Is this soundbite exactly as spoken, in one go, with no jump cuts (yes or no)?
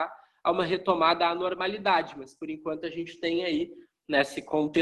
yes